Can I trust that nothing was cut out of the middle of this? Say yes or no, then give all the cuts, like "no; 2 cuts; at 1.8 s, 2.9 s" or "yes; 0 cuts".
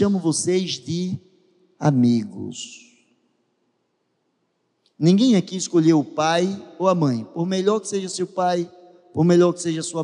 yes; 0 cuts